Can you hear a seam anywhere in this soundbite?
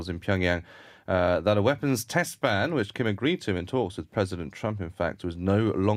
no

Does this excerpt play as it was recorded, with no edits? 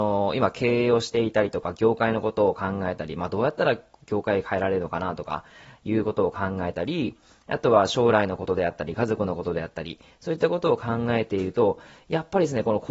yes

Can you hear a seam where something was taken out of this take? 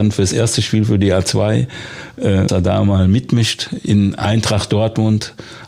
yes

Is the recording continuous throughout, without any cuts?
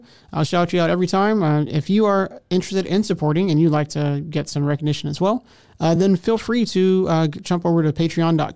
yes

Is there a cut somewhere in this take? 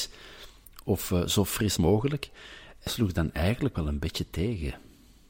yes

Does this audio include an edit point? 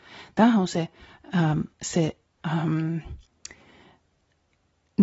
yes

